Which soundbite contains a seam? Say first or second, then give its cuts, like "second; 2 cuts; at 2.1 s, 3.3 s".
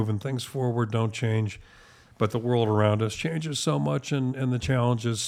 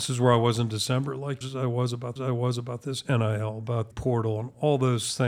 second; 3 cuts; at 1.4 s, 2.2 s, 3.9 s